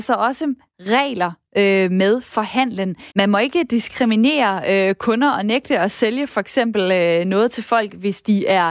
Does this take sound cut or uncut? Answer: cut